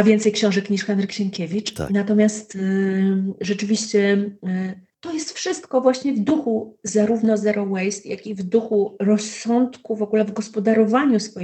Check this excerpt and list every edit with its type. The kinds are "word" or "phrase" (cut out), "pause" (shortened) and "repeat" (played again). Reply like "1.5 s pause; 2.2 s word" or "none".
none